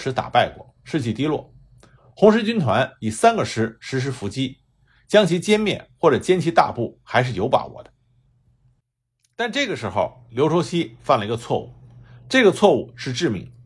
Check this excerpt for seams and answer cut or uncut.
uncut